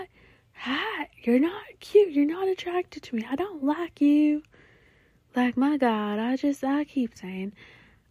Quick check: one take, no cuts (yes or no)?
yes